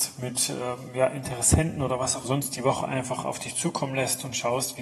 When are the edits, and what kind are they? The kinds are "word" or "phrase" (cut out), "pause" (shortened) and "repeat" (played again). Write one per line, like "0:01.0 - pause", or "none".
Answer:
0:02.2 - phrase

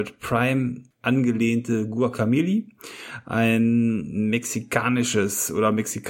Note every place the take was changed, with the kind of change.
0:00.9 - pause

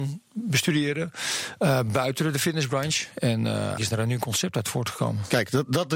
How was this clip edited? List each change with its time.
0:03.8 - word

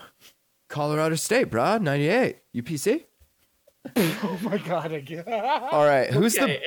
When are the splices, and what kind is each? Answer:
none

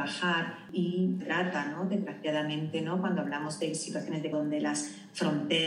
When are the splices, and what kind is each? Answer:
0:01.2 - phrase
0:04.3 - word

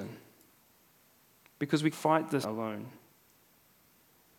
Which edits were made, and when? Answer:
0:01.9 - word
0:02.4 - word

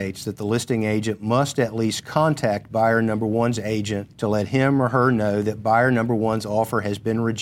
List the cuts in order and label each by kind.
0:04.1 - pause

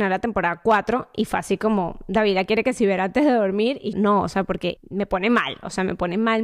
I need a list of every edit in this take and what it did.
0:03.9 - word
0:04.8 - word

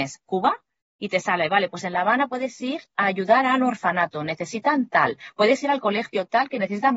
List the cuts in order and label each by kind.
none

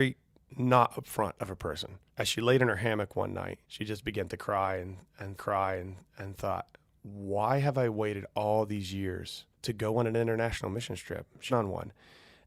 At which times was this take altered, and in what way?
0:02.1 - pause
0:03.6 - pause
0:05.4 - repeat
0:09.5 - pause
0:11.5 - phrase

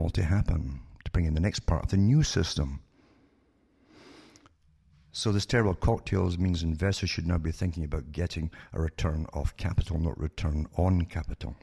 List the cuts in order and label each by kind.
none

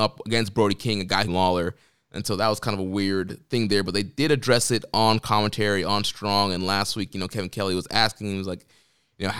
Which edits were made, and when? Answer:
0:01.3 - phrase

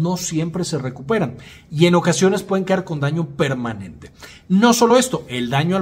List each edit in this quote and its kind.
none

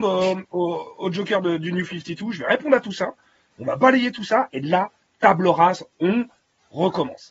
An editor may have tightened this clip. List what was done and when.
none

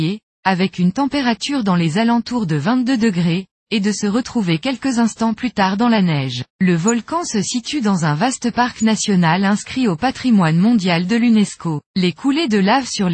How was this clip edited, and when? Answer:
0:06.5 - pause
0:11.9 - pause

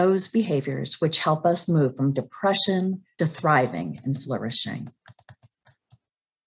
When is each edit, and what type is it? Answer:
0:03.2 - phrase

